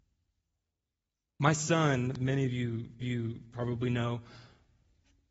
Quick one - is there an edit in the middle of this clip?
yes; 2 cuts; at 2.2 s, 3.0 s

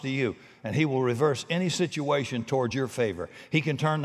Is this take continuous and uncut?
yes; 0 cuts

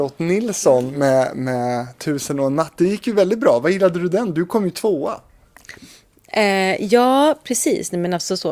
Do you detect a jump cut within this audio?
no; 0 cuts

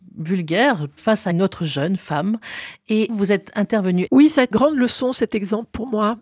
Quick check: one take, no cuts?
no; 2 cuts; at 3.1 s, 4.5 s

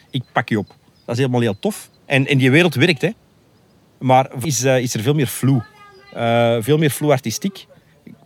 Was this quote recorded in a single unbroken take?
no; 2 cuts; at 2.0 s, 4.4 s

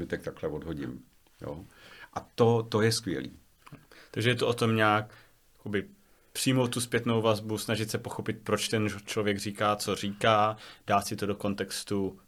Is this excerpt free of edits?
yes; 0 cuts

